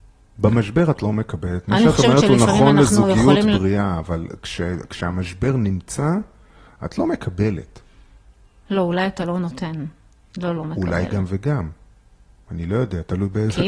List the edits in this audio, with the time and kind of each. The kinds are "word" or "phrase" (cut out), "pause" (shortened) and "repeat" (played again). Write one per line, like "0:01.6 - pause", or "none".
none